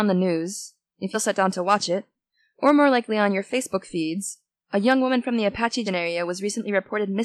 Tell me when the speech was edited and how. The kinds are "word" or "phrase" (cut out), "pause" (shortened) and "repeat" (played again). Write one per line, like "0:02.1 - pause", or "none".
0:01.1 - word
0:05.8 - word